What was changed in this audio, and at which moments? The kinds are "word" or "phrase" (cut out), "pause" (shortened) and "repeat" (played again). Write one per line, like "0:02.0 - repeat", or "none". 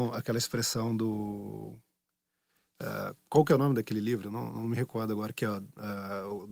none